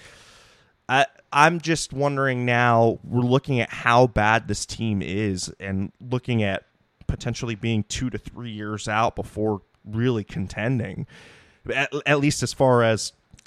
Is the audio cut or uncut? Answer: uncut